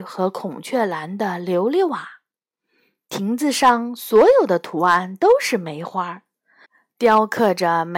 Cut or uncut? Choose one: uncut